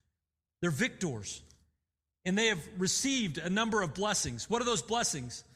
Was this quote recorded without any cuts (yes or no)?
yes